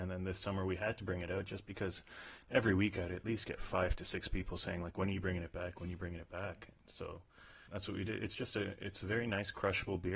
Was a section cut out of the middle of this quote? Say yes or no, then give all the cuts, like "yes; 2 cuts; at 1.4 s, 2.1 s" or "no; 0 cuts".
yes; 1 cut; at 7.7 s